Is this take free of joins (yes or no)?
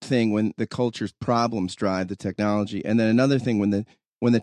yes